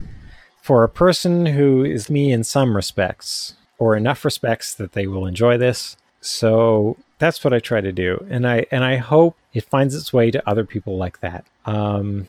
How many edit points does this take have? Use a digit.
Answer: 1